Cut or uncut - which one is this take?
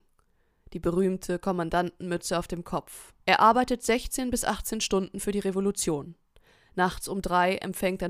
cut